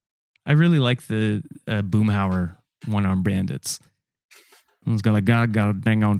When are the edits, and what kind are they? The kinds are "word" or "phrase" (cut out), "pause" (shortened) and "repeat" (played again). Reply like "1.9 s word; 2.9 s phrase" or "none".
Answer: none

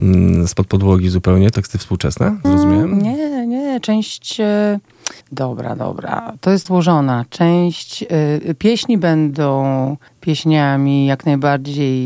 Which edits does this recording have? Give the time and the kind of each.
1.5 s word; 2.4 s phrase; 5.2 s pause; 6.7 s word; 10.1 s pause

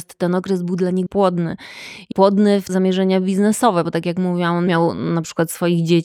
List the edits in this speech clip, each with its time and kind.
1.1 s word; 2.1 s word; 2.7 s word; 4.7 s word

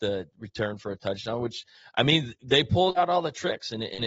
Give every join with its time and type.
none

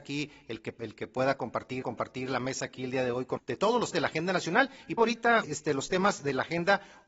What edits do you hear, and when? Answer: 1.8 s repeat; 3.4 s word; 3.9 s word; 5.0 s word; 5.4 s phrase

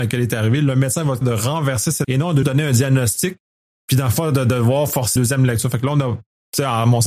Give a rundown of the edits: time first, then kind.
1.2 s word; 2.0 s word; 2.4 s word; 5.2 s word

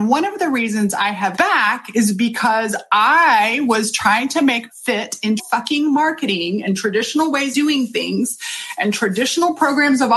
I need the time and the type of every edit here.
1.4 s word; 4.7 s word; 5.4 s word; 7.5 s word

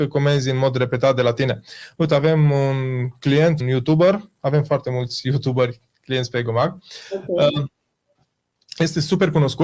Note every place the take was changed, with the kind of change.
3.6 s word

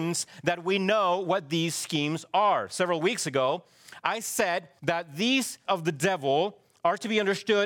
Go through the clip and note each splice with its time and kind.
4.8 s pause; 5.6 s word

